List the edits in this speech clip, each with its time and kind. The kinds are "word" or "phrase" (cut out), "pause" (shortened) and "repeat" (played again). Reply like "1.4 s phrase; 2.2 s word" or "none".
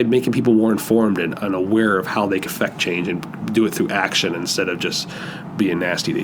2.5 s word